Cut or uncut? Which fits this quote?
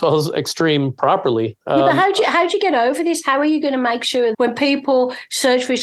cut